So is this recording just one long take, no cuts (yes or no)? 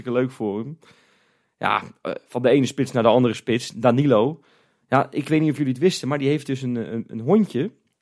yes